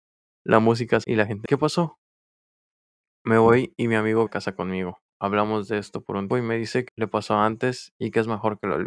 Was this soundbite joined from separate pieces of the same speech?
yes; 5 cuts; at 1.0 s, 1.4 s, 4.3 s, 6.3 s, 6.9 s

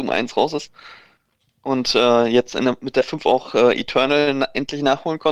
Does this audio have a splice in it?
no; 0 cuts

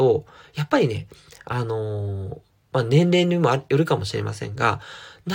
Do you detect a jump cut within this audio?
no; 0 cuts

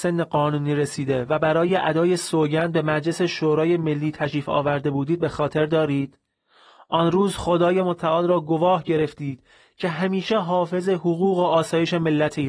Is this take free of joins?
yes; 0 cuts

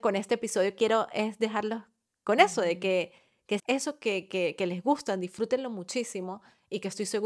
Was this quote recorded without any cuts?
no; 1 cut; at 3.6 s

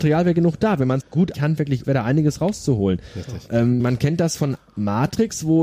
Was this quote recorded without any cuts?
no; 4 cuts; at 1.0 s, 1.3 s, 1.8 s, 3.8 s

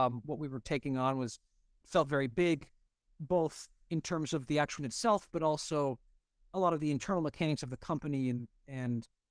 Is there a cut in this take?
yes; 1 cut; at 4.8 s

